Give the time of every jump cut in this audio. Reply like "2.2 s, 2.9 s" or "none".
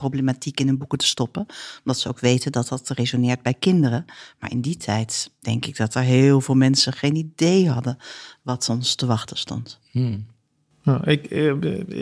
none